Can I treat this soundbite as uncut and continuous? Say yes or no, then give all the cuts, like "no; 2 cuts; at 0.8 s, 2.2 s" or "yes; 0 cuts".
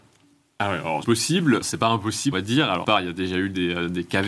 no; 4 cuts; at 1.0 s, 1.6 s, 2.3 s, 2.8 s